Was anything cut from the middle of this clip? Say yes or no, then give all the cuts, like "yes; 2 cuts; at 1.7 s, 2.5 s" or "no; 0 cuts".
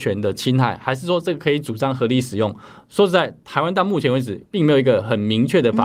yes; 1 cut; at 4.4 s